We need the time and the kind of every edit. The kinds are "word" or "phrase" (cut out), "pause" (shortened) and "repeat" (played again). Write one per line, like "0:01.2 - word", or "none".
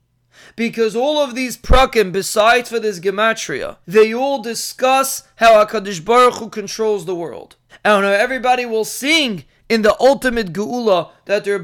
0:03.8 - pause
0:07.7 - pause